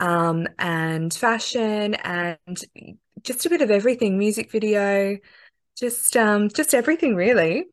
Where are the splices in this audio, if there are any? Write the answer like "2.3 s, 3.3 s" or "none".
none